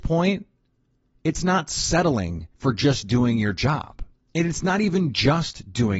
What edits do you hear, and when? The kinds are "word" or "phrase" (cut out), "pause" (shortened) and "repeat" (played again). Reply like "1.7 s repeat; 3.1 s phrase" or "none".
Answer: 2.5 s pause